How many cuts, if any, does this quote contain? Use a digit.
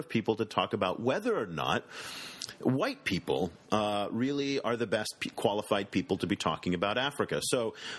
0